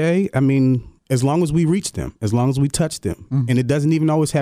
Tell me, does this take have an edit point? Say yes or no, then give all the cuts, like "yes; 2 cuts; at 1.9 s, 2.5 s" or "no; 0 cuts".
yes; 1 cut; at 1.0 s